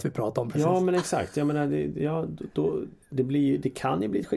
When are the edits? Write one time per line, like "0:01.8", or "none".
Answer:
0:03.0